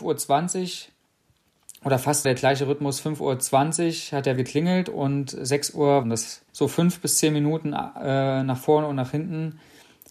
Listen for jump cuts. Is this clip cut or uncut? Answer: cut